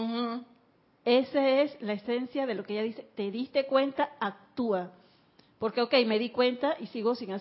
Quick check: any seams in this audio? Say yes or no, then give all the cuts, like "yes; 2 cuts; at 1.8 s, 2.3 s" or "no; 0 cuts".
no; 0 cuts